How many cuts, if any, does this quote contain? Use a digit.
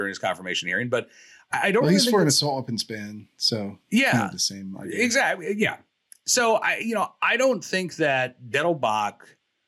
0